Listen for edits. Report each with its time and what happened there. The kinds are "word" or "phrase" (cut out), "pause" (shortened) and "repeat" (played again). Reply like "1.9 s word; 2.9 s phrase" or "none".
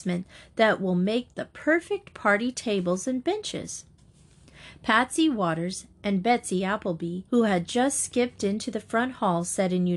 7.3 s pause